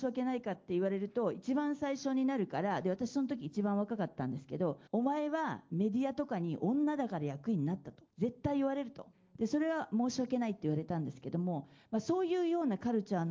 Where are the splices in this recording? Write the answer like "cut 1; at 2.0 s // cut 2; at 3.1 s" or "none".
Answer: cut 1; at 4.9 s // cut 2; at 8.1 s // cut 3; at 9.1 s